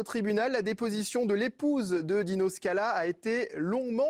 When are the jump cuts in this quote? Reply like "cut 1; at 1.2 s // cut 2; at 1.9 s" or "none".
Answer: none